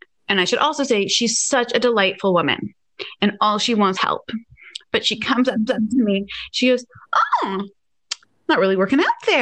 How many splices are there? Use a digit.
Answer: 2